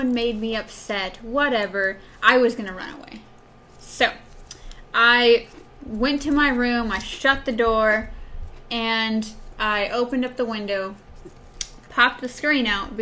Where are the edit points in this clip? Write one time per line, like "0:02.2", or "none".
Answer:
none